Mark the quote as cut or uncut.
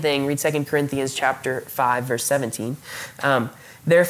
uncut